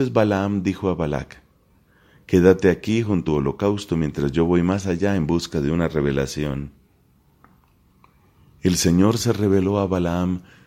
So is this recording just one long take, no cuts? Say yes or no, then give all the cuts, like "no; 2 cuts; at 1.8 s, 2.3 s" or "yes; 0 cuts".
no; 1 cut; at 3.3 s